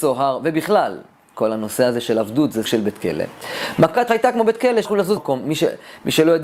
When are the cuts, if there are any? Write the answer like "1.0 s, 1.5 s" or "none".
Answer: 2.6 s, 4.1 s, 4.8 s, 5.2 s